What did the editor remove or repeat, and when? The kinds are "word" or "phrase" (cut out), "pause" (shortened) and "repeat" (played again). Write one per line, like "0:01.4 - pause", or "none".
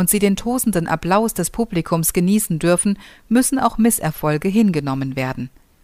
none